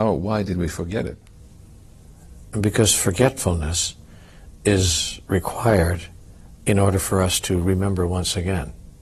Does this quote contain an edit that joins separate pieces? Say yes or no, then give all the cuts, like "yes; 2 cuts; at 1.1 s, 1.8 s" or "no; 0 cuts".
no; 0 cuts